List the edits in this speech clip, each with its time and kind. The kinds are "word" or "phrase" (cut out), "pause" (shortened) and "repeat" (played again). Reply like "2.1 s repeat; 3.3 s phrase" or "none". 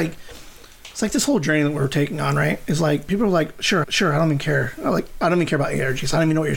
3.8 s repeat